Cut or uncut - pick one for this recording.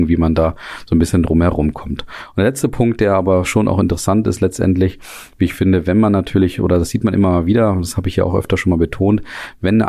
uncut